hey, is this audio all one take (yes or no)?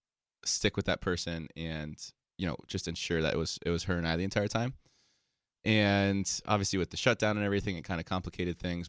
yes